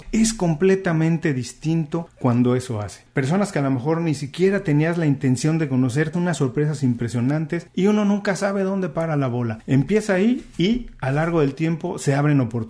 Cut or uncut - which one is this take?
cut